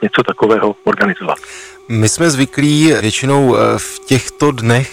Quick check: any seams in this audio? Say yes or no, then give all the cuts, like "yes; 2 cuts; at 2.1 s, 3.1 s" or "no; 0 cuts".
yes; 1 cut; at 3.0 s